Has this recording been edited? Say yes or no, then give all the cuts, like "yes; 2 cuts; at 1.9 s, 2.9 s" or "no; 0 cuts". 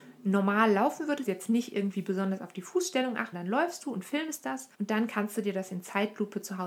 yes; 3 cuts; at 1.3 s, 3.3 s, 4.7 s